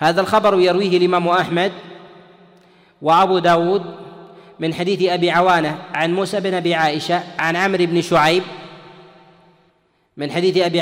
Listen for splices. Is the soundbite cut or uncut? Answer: uncut